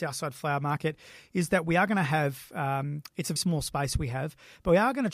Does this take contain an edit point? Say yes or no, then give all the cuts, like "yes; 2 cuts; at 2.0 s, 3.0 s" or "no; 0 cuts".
yes; 1 cut; at 3.4 s